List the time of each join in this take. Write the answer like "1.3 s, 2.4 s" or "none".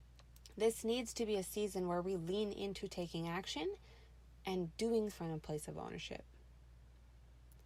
5.1 s